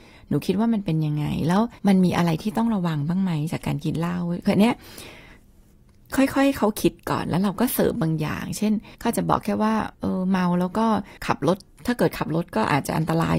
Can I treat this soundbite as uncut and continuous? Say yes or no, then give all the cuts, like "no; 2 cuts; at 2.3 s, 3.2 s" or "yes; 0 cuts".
no; 4 cuts; at 1.8 s, 8.9 s, 9.9 s, 11.2 s